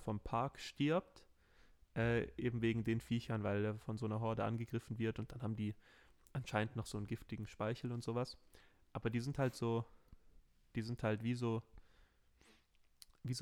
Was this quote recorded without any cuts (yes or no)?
yes